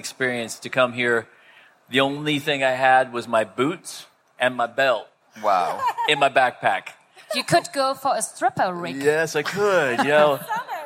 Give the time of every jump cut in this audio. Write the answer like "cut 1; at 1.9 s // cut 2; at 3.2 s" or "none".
none